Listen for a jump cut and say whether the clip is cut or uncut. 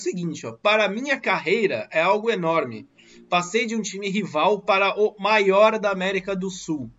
uncut